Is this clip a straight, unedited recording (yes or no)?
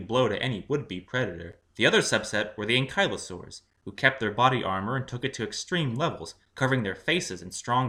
no